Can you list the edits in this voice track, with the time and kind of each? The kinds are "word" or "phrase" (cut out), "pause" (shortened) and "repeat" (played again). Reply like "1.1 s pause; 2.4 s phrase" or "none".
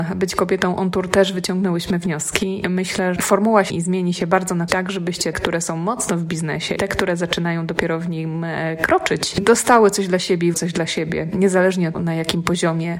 3.2 s word; 3.7 s word; 4.7 s word; 5.3 s word; 6.8 s word; 10.5 s word; 11.9 s word

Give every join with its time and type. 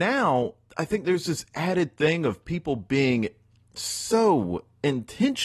none

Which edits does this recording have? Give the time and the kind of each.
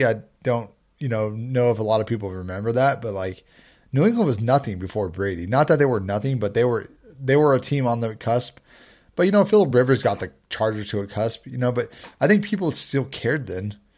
none

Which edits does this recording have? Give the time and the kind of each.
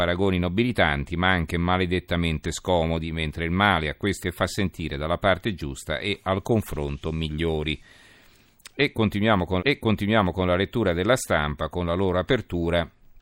4.2 s phrase; 9.6 s repeat

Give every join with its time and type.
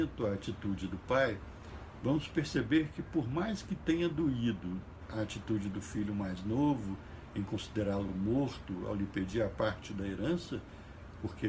none

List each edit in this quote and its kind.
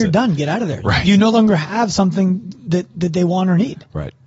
none

